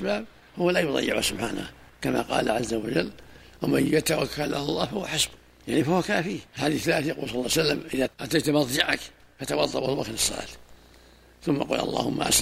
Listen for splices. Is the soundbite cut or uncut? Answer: cut